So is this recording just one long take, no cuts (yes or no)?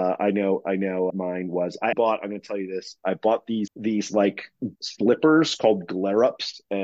no